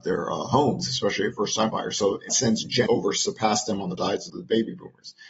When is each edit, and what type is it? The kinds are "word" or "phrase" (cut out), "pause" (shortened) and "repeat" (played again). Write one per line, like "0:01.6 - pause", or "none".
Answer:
0:01.3 - word
0:01.7 - word
0:02.3 - word
0:02.9 - word
0:04.0 - word
0:04.3 - word